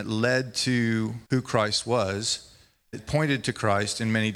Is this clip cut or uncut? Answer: cut